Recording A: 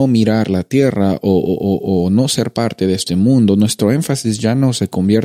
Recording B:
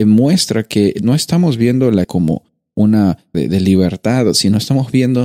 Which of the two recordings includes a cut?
B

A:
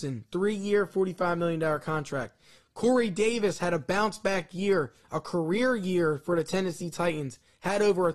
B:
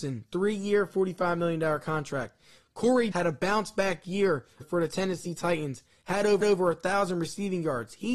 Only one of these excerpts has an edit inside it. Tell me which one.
B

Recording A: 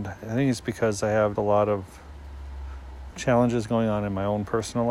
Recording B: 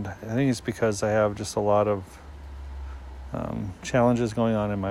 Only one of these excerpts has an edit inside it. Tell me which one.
A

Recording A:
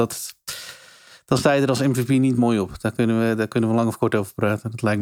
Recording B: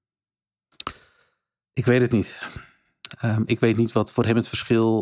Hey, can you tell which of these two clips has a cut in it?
A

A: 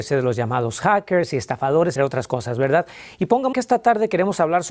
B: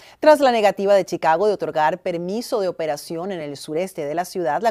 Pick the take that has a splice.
A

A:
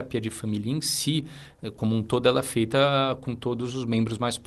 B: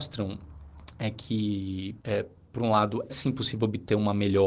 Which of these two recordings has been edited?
B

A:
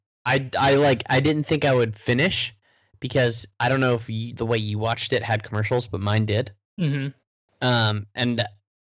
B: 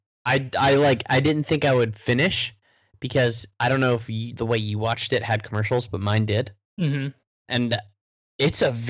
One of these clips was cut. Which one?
B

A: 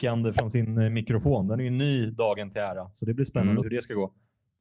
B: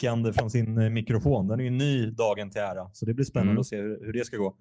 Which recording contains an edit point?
A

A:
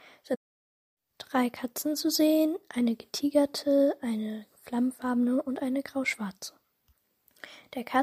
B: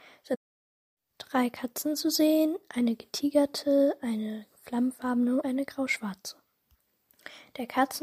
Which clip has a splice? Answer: B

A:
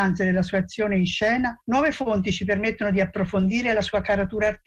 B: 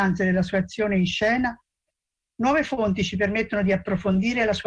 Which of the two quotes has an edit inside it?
A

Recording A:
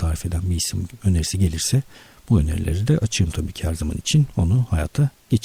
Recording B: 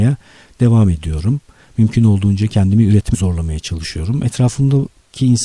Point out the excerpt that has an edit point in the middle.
B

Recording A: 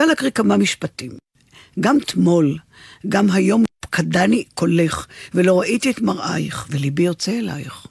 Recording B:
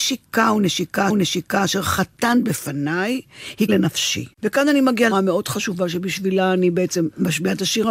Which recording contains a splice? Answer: B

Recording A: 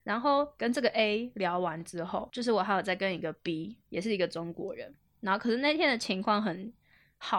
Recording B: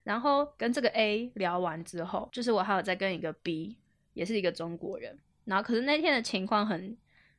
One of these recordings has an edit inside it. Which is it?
A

